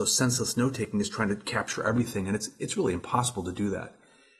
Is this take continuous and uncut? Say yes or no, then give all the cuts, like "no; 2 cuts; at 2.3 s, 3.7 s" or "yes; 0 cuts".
yes; 0 cuts